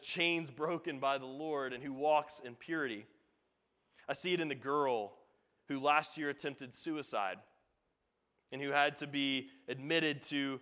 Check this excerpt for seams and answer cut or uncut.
uncut